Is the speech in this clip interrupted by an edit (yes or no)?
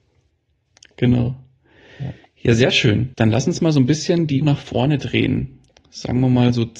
yes